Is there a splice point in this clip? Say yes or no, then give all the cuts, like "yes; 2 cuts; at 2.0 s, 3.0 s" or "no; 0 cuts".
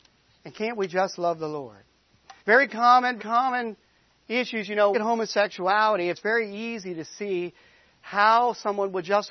yes; 4 cuts; at 2.4 s, 3.2 s, 4.9 s, 6.1 s